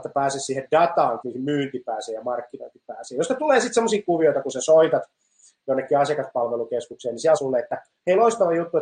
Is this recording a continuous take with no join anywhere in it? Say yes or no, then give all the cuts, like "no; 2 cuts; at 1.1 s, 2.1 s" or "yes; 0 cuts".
no; 3 cuts; at 1.2 s, 4.0 s, 7.4 s